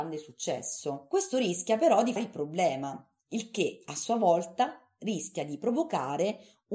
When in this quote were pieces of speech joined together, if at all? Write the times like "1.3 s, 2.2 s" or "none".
2.2 s